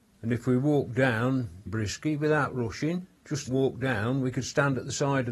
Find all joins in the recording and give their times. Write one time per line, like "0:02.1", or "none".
0:01.7
0:03.2
0:03.5